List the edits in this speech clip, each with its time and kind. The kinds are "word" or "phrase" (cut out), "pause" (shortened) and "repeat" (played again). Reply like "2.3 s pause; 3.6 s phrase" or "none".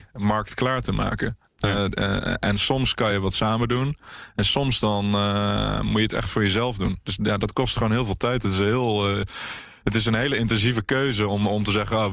none